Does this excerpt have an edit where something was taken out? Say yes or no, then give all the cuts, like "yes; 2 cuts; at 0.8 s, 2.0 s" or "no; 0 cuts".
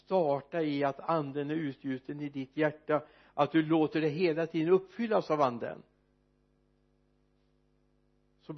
no; 0 cuts